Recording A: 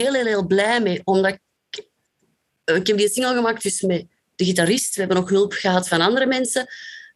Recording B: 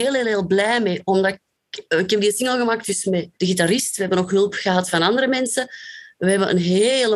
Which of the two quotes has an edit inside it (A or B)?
B